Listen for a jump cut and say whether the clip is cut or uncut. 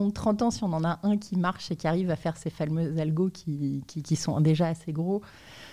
uncut